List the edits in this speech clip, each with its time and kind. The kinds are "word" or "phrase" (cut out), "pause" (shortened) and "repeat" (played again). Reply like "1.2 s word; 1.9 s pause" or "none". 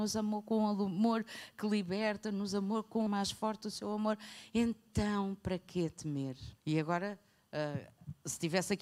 3.1 s phrase; 6.6 s pause